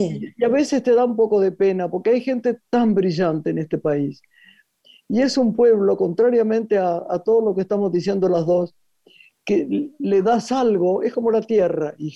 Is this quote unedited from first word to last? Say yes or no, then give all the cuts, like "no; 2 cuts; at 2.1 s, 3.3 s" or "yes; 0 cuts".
yes; 0 cuts